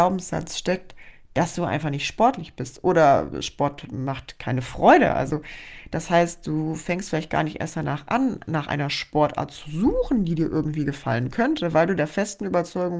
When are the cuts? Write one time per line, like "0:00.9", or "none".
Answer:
none

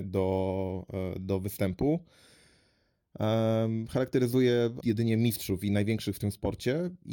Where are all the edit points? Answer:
0:04.8

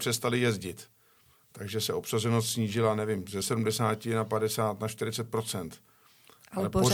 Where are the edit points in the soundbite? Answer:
none

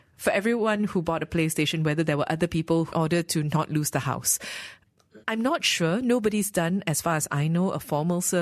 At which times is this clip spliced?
0:02.9
0:05.2

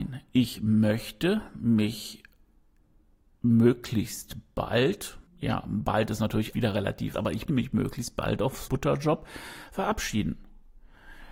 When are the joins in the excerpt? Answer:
0:05.3
0:06.5
0:07.1
0:07.5
0:08.7

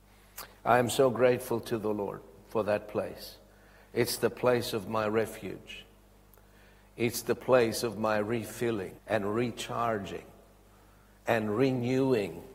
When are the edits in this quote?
0:09.0

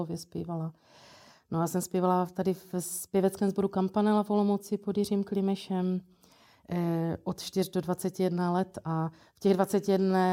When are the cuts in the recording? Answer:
none

